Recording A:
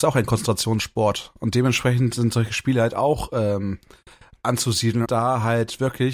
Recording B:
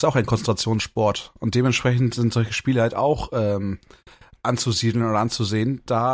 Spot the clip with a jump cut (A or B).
A